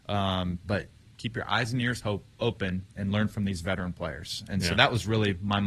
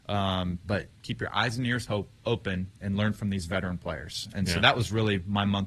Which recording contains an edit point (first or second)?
second